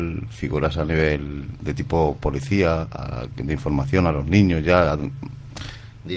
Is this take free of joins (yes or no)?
yes